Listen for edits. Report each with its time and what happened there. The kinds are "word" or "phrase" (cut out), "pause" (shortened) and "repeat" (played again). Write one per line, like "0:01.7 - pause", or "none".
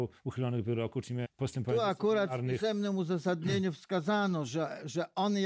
0:01.2 - word

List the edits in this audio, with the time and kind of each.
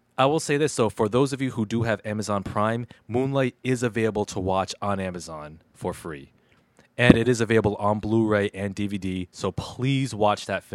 none

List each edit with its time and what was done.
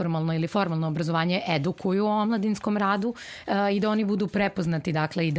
none

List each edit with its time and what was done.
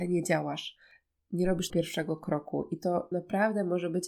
0:01.7 - word
0:03.1 - word

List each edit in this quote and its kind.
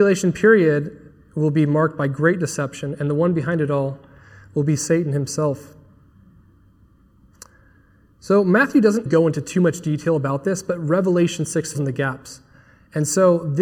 0:09.1 - word
0:11.7 - word

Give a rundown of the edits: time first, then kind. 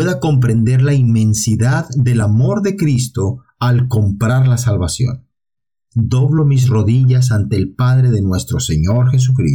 none

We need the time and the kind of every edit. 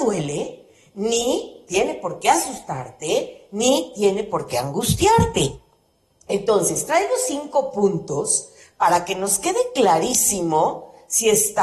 none

